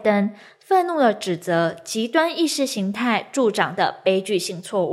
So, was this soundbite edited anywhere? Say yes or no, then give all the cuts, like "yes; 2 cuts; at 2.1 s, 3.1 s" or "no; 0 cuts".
no; 0 cuts